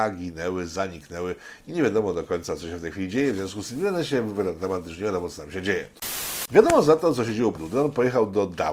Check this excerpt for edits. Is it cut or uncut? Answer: cut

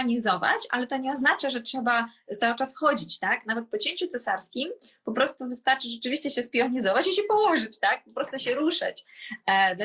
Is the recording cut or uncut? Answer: uncut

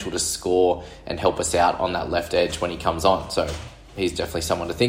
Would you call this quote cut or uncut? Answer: uncut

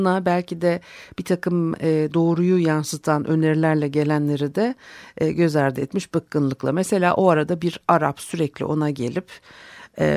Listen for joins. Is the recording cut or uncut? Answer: uncut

